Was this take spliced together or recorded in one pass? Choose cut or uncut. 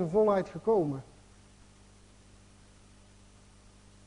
uncut